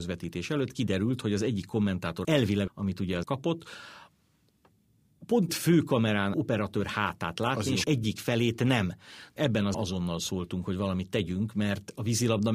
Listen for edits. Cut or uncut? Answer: cut